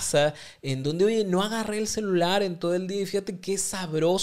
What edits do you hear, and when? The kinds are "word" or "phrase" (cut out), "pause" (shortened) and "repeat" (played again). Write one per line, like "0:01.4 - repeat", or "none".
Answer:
none